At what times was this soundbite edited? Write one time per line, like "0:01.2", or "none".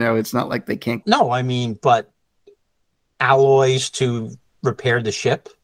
0:01.0